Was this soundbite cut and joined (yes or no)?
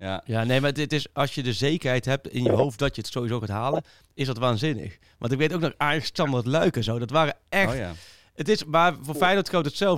no